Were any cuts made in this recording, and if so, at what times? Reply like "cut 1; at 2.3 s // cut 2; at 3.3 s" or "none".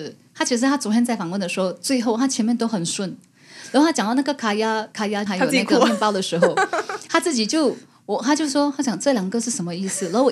cut 1; at 5.3 s

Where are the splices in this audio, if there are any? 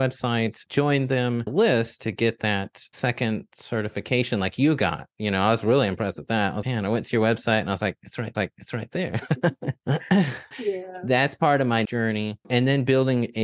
cut 1; at 1.5 s // cut 2; at 6.6 s // cut 3; at 8.3 s // cut 4; at 10.5 s // cut 5; at 11.9 s

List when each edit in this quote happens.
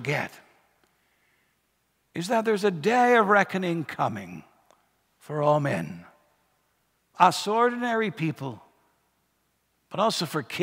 cut 1; at 7.1 s

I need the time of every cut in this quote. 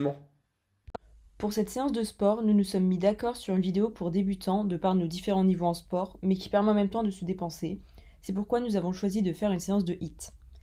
none

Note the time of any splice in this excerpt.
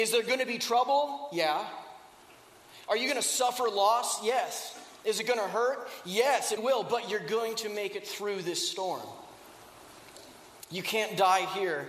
cut 1; at 5.0 s // cut 2; at 6.6 s

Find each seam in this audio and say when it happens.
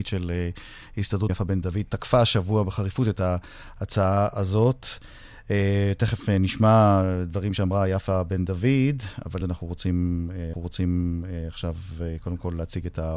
cut 1; at 1.3 s // cut 2; at 9.4 s // cut 3; at 10.5 s

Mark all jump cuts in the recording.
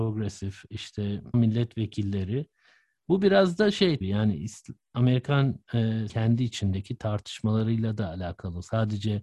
cut 1; at 1.3 s // cut 2; at 4.0 s // cut 3; at 6.1 s

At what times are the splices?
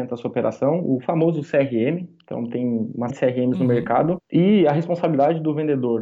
cut 1; at 3.1 s // cut 2; at 4.2 s

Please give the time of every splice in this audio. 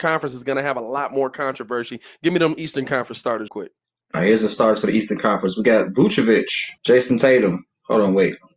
cut 1; at 3.5 s // cut 2; at 6.8 s

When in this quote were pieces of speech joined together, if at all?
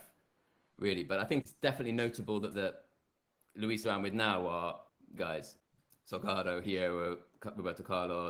cut 1; at 1.4 s // cut 2; at 2.5 s // cut 3; at 3.8 s // cut 4; at 5.2 s

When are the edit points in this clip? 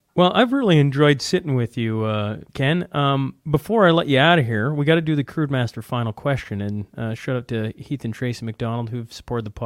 cut 1; at 2.5 s // cut 2; at 3.4 s

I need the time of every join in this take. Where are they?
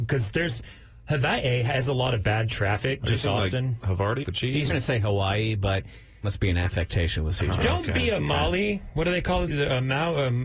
cut 1; at 3.2 s // cut 2; at 4.2 s // cut 3; at 4.7 s // cut 4; at 6.2 s // cut 5; at 9.5 s

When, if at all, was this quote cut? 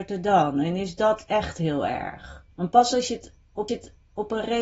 cut 1; at 2.5 s // cut 2; at 3.7 s

